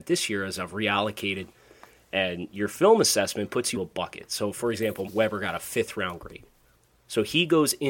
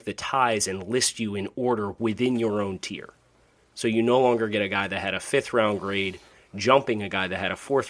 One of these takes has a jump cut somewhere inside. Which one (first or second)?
first